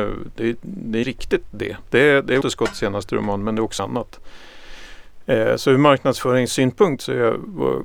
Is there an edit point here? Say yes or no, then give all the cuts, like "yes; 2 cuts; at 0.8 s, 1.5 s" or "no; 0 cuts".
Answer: yes; 3 cuts; at 1.0 s, 2.4 s, 3.8 s